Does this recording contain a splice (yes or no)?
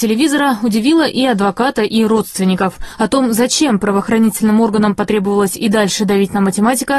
no